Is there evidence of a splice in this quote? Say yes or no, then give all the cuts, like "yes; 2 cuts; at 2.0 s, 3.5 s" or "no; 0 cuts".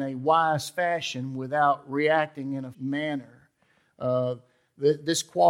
yes; 1 cut; at 2.7 s